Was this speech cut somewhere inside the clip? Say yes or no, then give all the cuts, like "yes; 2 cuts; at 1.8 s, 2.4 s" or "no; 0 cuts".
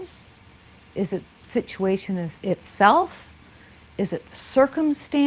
yes; 2 cuts; at 1.3 s, 2.4 s